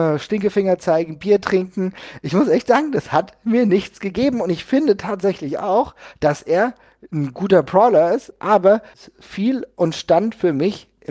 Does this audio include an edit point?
no; 0 cuts

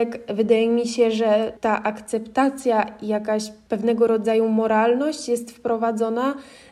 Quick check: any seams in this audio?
no; 0 cuts

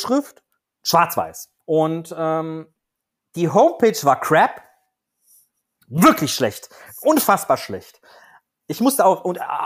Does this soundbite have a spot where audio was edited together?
yes; 1 cut; at 1.6 s

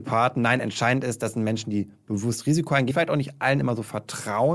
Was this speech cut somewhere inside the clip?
yes; 1 cut; at 2.9 s

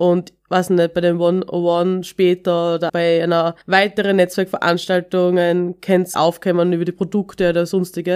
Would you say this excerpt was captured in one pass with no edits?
no; 3 cuts; at 2.9 s, 3.6 s, 6.1 s

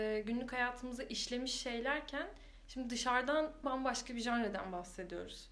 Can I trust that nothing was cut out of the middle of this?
no; 1 cut; at 3.6 s

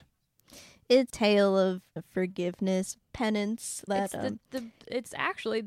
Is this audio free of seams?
no; 3 cuts; at 1.1 s, 2.0 s, 3.9 s

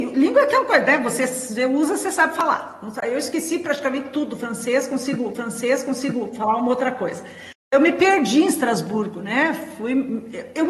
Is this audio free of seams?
no; 1 cut; at 5.3 s

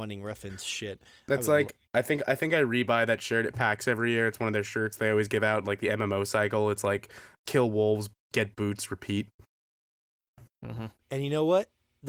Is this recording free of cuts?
no; 2 cuts; at 1.9 s, 7.4 s

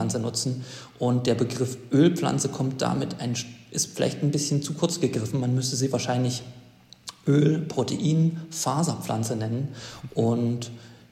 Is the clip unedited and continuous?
yes; 0 cuts

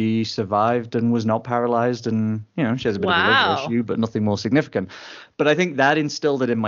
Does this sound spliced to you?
yes; 1 cut; at 5.3 s

